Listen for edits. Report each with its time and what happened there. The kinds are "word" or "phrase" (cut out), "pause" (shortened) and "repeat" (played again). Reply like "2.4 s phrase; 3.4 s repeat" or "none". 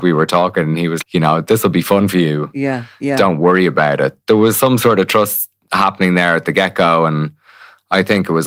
1.0 s word; 4.2 s word